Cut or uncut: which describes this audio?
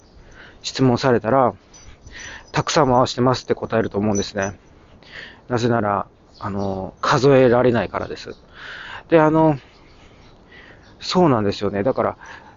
cut